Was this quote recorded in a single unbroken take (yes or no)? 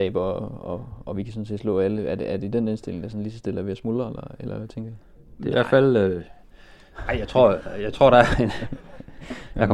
yes